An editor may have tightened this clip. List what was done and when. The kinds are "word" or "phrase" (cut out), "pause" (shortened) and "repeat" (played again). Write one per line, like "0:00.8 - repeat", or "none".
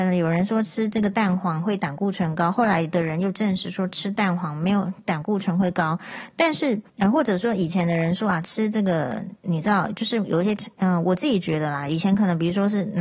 0:06.9 - pause
0:09.4 - pause